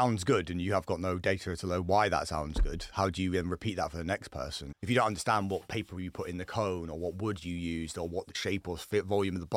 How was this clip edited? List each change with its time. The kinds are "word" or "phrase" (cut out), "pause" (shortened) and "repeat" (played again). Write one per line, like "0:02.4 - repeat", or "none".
none

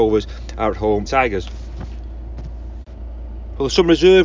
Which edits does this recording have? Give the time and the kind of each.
0:01.1 - phrase

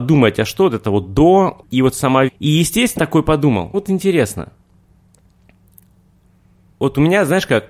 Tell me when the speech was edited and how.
0:01.6 - word
0:02.3 - word
0:03.0 - word
0:03.7 - word

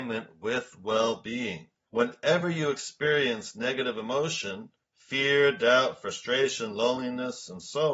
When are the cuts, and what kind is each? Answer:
none

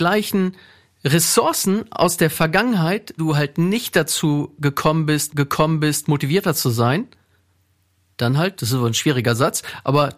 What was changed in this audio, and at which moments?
0:03.2 - phrase
0:05.3 - repeat

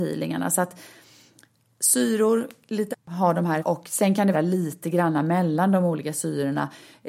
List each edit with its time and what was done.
0:02.9 - word
0:03.6 - word
0:04.3 - word

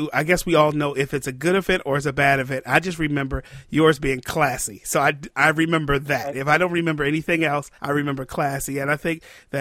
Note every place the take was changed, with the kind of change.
0:07.8 - pause

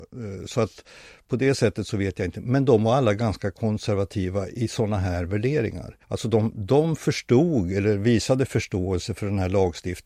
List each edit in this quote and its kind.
0:06.0 - pause

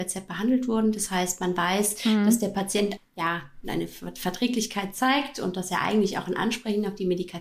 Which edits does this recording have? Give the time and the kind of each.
0:03.0 - word

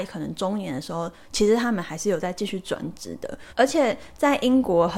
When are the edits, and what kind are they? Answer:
0:03.5 - pause

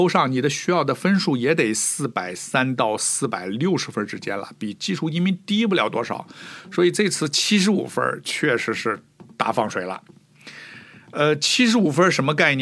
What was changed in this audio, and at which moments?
none

